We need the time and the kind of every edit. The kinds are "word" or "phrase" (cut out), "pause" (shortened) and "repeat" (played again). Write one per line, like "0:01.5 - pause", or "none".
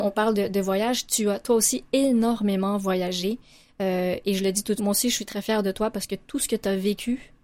0:04.8 - word

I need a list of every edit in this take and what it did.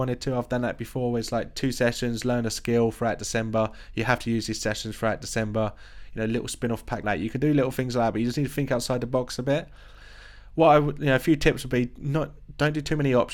0:07.0 - word

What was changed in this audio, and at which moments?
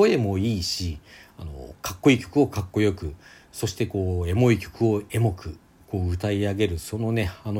none

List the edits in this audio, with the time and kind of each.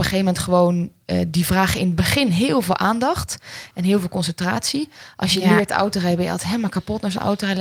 none

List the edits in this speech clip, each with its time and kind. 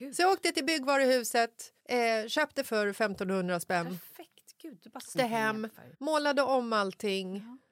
0:01.8 - pause
0:02.6 - phrase
0:05.1 - word
0:05.9 - pause

